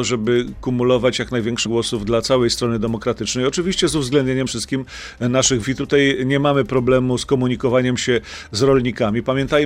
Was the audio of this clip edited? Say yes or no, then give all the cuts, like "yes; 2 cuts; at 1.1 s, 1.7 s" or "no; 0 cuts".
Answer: yes; 3 cuts; at 1.6 s, 4.5 s, 5.6 s